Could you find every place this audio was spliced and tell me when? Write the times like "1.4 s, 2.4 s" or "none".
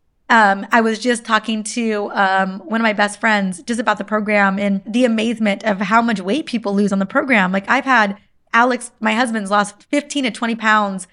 4.8 s